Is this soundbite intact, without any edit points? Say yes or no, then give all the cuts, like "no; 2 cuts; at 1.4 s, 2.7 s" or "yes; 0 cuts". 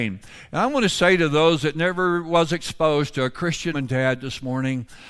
no; 1 cut; at 3.7 s